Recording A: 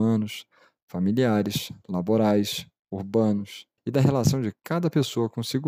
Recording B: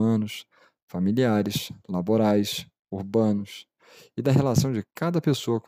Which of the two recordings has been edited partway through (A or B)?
A